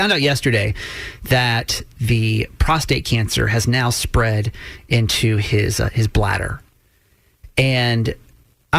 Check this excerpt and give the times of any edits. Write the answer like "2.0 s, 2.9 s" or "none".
none